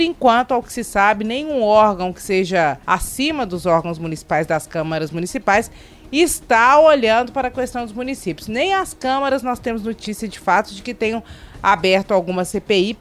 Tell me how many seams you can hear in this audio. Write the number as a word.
one